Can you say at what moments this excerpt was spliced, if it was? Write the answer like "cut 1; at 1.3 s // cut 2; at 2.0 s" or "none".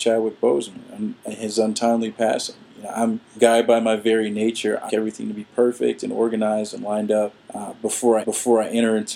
cut 1; at 1.2 s // cut 2; at 3.3 s // cut 3; at 4.9 s // cut 4; at 7.4 s // cut 5; at 8.2 s